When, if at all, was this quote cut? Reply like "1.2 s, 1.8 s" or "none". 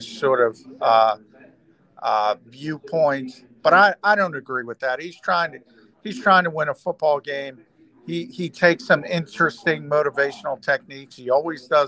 none

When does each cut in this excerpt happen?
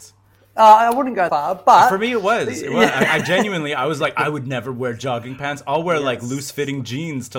1.3 s

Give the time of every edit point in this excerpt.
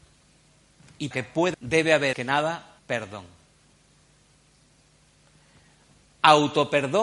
1.1 s, 1.5 s, 2.1 s, 2.8 s

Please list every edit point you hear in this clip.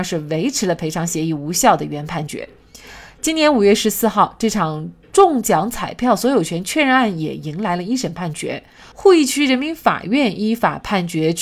none

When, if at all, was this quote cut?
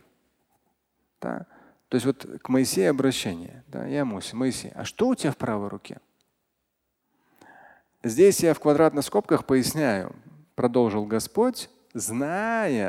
none

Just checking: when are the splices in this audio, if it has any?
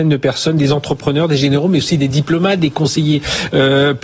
none

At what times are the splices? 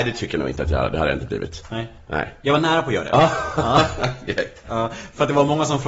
none

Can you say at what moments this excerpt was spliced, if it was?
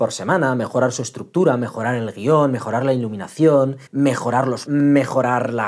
3.9 s, 4.7 s

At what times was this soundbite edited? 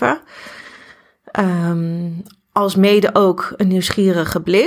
none

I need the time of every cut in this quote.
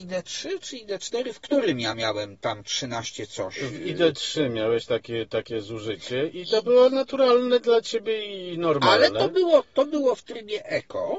none

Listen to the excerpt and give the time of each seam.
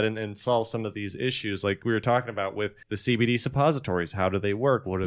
2.8 s

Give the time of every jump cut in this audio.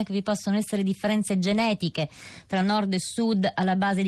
none

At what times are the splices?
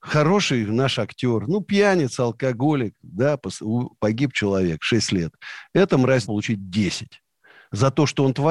6.3 s

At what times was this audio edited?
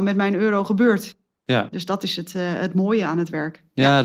none

